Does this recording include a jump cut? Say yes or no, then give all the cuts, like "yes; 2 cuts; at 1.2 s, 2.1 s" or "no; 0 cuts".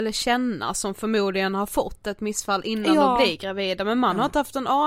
no; 0 cuts